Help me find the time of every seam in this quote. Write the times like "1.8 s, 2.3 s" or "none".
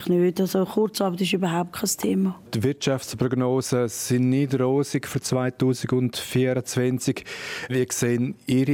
2.5 s